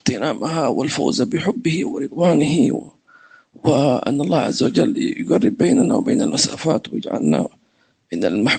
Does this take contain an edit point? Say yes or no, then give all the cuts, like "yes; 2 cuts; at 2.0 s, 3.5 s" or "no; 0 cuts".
no; 0 cuts